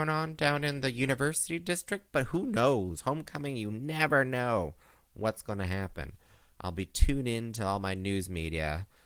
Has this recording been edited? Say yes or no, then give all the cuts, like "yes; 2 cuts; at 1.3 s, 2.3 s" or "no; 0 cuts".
no; 0 cuts